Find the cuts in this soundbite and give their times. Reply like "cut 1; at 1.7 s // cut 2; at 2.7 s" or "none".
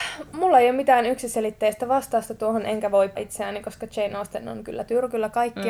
cut 1; at 3.1 s